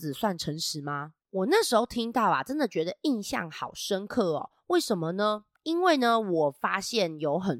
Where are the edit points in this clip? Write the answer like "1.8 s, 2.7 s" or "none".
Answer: 1.2 s